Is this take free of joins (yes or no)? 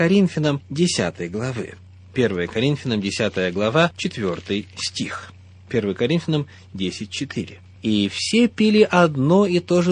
yes